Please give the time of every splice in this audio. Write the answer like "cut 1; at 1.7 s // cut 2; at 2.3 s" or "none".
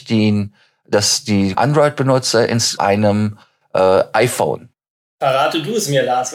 cut 1; at 1.5 s // cut 2; at 2.8 s